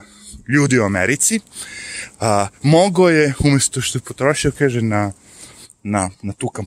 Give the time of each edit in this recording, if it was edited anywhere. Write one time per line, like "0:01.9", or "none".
none